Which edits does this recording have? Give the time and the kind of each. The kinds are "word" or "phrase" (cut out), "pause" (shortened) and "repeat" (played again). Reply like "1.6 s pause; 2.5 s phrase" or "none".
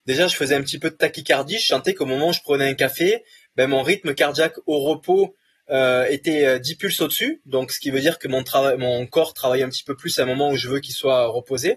none